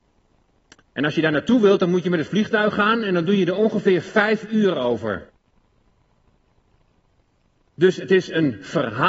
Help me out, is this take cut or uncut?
uncut